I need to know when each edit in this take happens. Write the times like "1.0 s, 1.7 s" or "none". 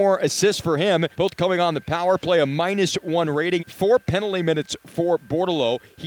1.1 s, 3.6 s